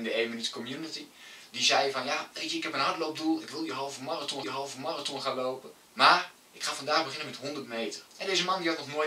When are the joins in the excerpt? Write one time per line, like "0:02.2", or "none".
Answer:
0:04.4
0:05.8
0:08.1